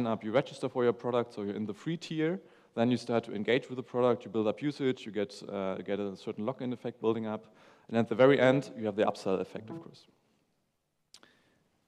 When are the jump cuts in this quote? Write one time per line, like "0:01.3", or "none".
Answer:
none